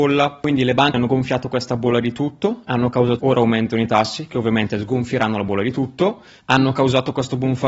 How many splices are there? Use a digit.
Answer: 2